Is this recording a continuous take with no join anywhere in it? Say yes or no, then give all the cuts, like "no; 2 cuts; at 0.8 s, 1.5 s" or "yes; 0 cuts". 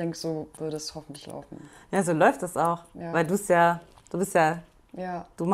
yes; 0 cuts